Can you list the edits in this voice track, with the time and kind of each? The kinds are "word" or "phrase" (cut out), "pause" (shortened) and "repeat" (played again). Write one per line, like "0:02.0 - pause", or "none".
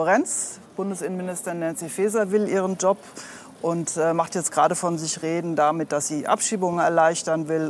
none